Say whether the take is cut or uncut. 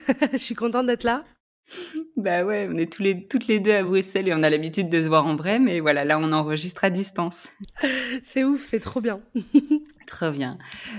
uncut